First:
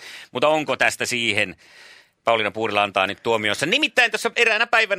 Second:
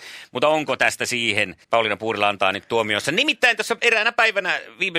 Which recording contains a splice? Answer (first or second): second